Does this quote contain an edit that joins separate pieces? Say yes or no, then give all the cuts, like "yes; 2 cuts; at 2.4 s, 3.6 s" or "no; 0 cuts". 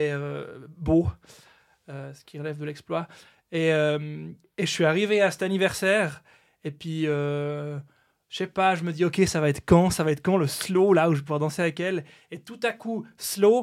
no; 0 cuts